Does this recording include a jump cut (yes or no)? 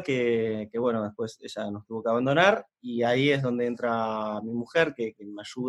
no